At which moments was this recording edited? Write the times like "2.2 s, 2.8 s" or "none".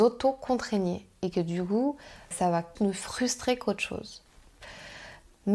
2.3 s, 2.8 s